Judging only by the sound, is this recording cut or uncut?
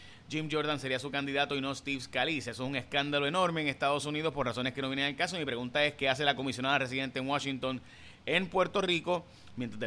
uncut